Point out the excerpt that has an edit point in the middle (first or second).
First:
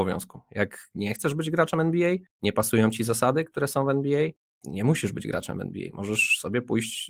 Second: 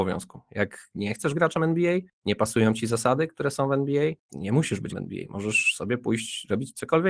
second